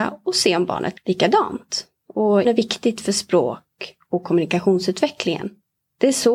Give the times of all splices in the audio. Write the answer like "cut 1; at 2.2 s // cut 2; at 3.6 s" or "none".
cut 1; at 0.9 s // cut 2; at 2.4 s